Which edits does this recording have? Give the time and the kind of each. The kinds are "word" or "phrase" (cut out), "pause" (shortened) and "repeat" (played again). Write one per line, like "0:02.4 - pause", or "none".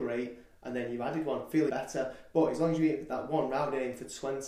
0:01.7 - word